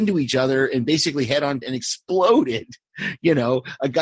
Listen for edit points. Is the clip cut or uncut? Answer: cut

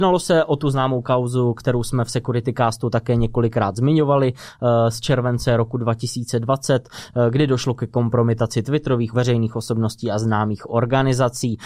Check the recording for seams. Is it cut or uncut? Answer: cut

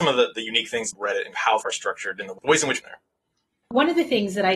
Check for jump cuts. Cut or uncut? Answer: cut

